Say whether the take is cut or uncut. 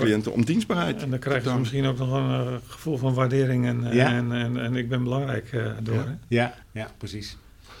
cut